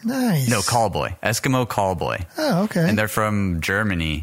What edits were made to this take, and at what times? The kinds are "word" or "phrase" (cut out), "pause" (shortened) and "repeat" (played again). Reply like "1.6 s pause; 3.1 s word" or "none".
none